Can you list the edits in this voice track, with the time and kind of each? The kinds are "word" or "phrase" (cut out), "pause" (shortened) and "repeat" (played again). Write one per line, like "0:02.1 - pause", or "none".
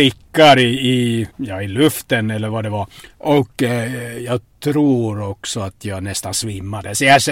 0:01.3 - pause
0:03.0 - pause